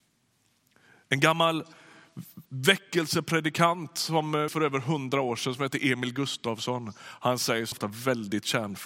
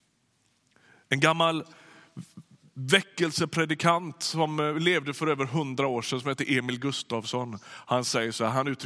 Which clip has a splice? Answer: first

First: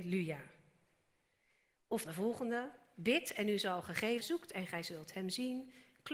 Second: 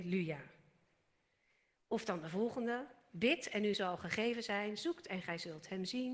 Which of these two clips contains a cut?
first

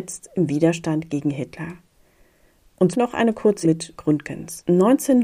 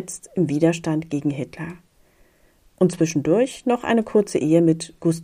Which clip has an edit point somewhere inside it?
first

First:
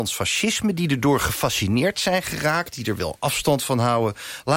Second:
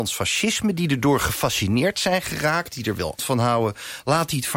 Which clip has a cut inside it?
second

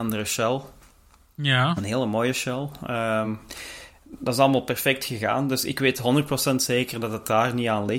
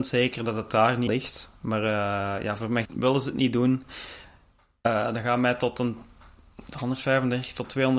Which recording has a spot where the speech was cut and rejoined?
second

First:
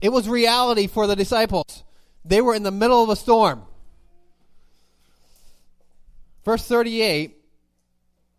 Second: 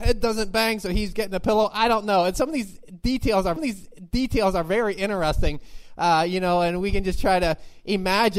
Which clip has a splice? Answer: second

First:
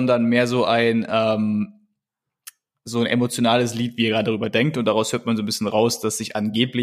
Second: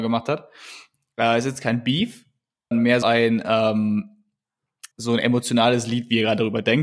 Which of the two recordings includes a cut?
second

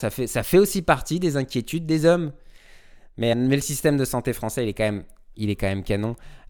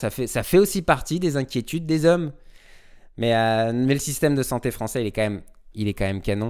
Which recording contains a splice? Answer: first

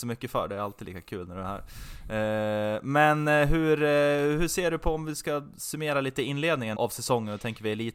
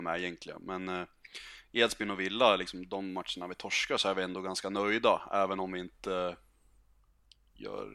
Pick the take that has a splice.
first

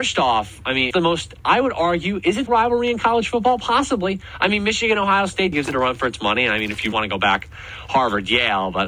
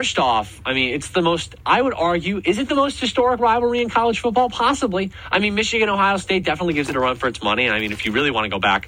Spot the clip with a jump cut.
first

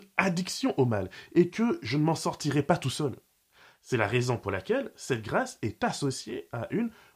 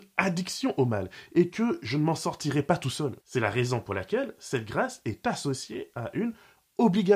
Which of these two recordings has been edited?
second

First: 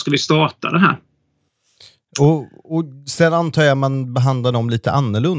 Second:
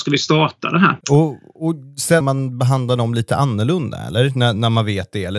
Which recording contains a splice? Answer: second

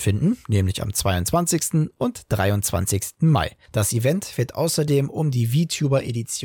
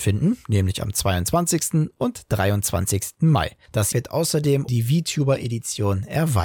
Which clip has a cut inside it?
second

